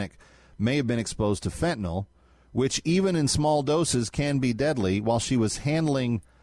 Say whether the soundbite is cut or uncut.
uncut